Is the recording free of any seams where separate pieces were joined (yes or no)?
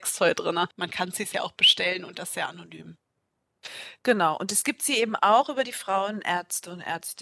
yes